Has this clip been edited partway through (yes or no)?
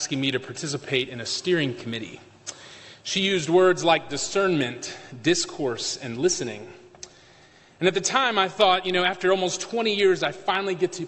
no